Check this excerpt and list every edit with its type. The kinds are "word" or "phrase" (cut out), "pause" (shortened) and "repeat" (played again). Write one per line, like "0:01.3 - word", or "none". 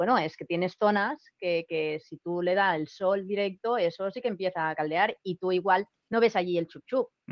none